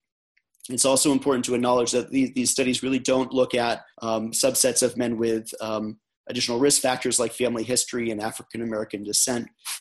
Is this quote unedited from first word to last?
no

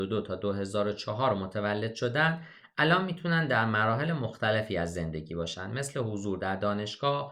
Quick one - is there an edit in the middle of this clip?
no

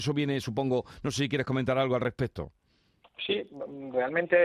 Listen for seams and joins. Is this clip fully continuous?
yes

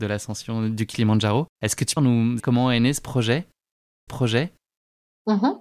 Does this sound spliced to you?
yes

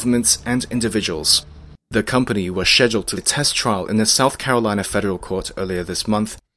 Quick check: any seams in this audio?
yes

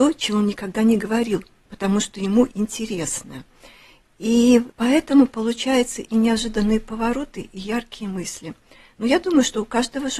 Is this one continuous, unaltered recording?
no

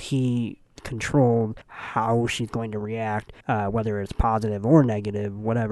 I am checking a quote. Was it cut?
yes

